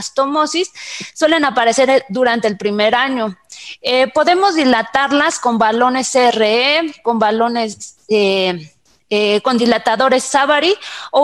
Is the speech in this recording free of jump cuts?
yes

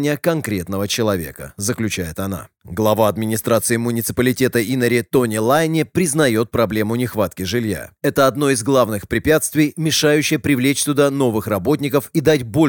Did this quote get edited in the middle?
no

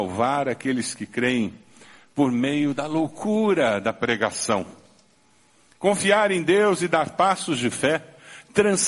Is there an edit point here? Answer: no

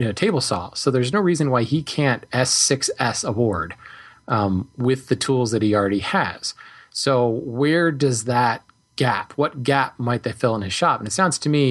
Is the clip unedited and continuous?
yes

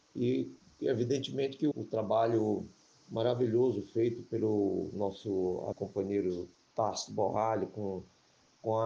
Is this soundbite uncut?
no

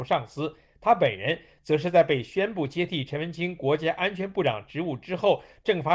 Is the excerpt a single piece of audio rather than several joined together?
yes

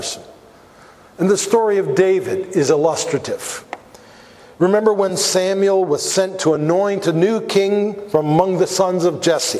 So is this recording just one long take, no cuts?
yes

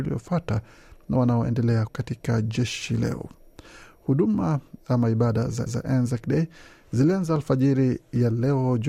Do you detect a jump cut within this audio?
yes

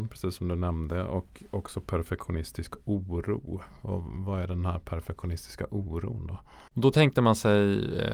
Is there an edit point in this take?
no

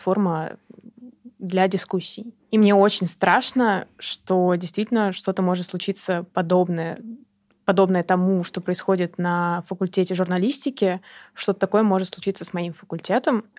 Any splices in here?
no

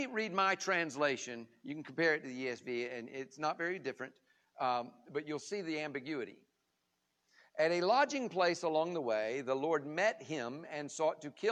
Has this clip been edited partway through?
no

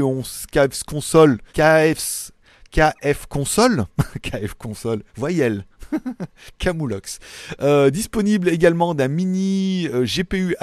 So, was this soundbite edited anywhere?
yes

